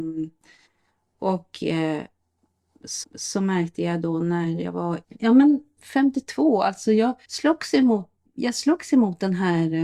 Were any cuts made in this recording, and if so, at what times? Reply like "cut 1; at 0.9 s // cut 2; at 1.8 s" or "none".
cut 1; at 3.0 s // cut 2; at 5.0 s // cut 3; at 7.2 s // cut 4; at 8.3 s